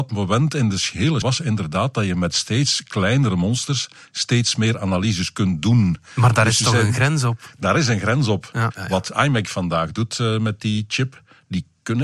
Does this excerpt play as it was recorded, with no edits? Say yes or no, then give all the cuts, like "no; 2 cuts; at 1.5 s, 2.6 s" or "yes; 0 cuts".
no; 1 cut; at 1.2 s